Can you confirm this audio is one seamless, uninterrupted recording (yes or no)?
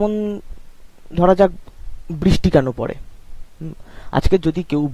yes